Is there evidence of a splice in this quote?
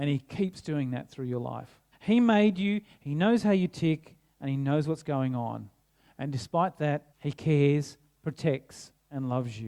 yes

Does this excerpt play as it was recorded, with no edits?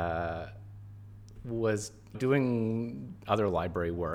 no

